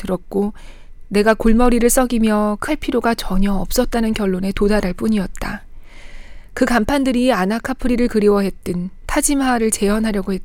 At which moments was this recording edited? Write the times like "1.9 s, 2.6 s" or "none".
2.7 s